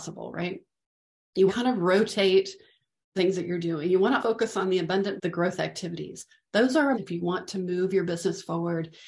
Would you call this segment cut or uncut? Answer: cut